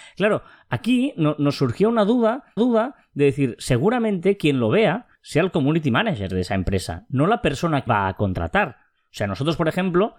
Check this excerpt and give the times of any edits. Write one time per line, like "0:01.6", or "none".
0:02.6
0:05.1
0:07.9